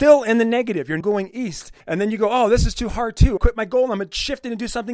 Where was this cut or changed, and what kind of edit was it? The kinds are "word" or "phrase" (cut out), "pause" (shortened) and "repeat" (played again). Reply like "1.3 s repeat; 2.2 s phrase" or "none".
1.0 s word; 1.8 s pause; 3.4 s phrase